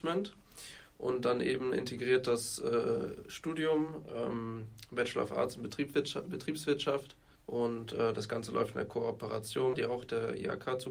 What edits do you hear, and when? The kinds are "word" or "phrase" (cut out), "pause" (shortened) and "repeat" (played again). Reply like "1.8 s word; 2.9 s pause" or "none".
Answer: 7.3 s pause; 9.7 s phrase